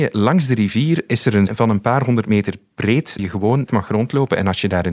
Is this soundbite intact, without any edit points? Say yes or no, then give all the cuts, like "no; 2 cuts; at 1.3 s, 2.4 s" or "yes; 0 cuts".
no; 3 cuts; at 1.5 s, 3.2 s, 3.7 s